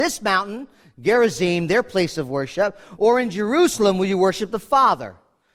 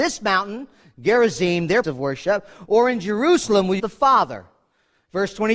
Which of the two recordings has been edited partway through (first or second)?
second